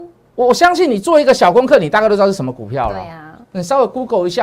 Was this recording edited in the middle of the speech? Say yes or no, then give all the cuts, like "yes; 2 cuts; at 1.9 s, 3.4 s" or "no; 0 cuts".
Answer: yes; 1 cut; at 3.4 s